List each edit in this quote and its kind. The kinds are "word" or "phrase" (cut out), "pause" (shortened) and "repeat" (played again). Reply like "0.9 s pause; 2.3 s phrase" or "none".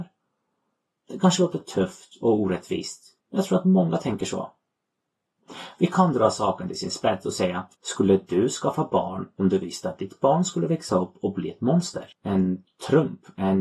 3.2 s pause; 7.7 s pause; 12.1 s pause